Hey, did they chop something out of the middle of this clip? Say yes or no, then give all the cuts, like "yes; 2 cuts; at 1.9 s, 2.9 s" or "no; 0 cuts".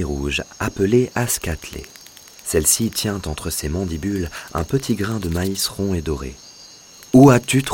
no; 0 cuts